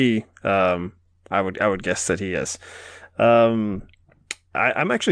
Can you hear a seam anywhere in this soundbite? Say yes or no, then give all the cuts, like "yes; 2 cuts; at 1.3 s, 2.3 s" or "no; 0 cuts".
no; 0 cuts